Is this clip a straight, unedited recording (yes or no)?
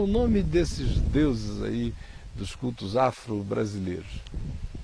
yes